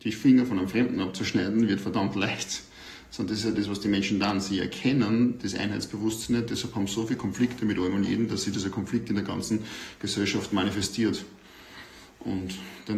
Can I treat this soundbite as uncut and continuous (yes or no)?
yes